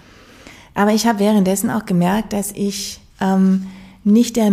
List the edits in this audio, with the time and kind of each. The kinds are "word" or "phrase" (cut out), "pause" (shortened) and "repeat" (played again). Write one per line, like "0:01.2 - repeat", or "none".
0:03.1 - pause